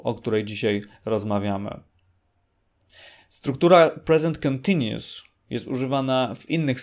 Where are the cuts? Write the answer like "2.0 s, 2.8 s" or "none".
none